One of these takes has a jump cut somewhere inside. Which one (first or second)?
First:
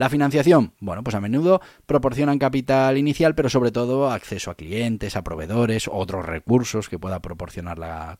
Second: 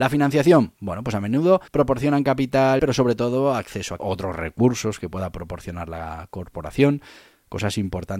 second